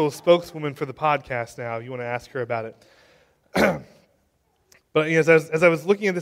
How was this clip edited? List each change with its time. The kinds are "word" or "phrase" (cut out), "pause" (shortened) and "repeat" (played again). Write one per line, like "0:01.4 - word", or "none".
none